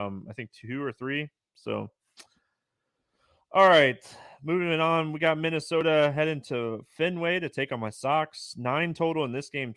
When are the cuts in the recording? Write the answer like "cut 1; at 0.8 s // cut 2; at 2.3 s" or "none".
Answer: none